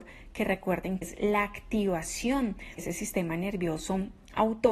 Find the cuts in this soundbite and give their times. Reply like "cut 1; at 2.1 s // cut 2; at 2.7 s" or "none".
cut 1; at 1.0 s // cut 2; at 2.8 s